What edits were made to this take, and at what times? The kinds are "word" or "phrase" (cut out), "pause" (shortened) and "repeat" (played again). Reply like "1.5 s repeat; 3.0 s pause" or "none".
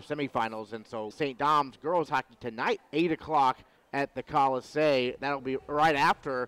1.1 s phrase; 2.1 s word; 2.8 s word